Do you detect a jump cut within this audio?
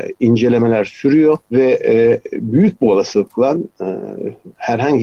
yes; 1 cut; at 1.4 s

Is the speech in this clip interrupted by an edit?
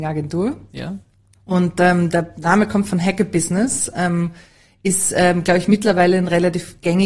no; 0 cuts

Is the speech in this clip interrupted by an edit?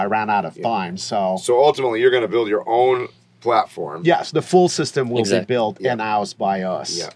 no; 0 cuts

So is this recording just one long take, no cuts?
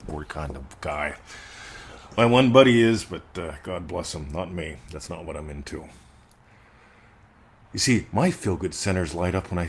yes; 0 cuts

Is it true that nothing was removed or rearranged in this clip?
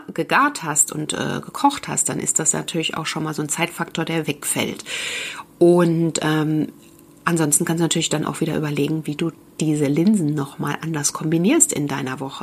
yes; 0 cuts

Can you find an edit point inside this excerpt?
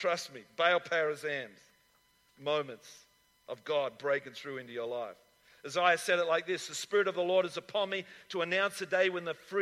no; 0 cuts

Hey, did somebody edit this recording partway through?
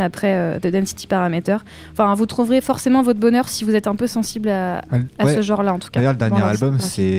no; 0 cuts

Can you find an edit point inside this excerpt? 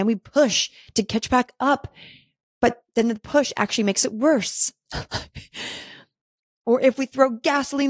no; 0 cuts

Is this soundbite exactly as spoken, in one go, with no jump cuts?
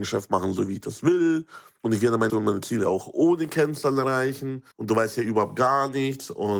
no; 2 cuts; at 2.3 s, 4.7 s

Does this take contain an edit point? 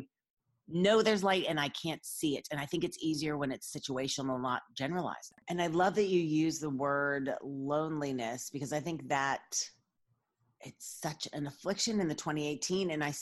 no; 0 cuts

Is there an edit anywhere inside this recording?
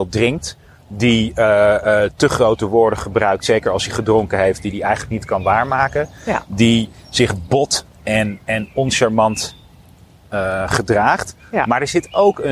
no; 0 cuts

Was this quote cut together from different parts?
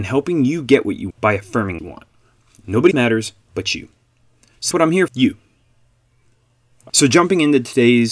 yes; 6 cuts; at 1.1 s, 1.8 s, 2.9 s, 4.7 s, 5.1 s, 6.9 s

